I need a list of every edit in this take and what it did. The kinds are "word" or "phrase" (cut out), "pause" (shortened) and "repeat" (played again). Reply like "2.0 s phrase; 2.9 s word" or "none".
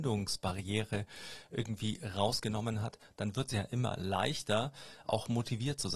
none